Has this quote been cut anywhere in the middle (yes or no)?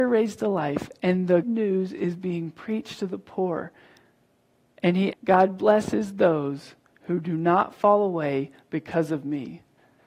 yes